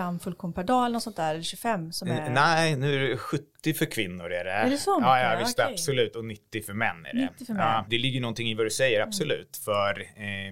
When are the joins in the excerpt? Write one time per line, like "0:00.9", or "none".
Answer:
none